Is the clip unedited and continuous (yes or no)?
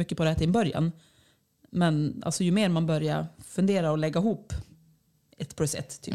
yes